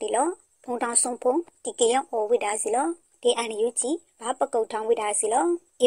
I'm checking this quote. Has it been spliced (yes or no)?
no